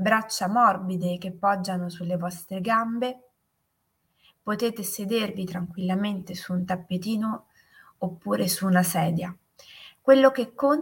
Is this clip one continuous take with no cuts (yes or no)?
yes